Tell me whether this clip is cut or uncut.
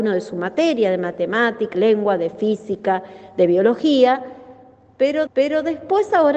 cut